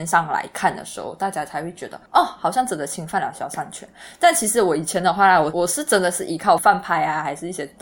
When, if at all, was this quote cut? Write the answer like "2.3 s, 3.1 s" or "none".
2.1 s